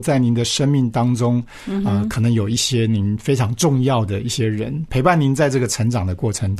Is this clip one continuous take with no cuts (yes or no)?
yes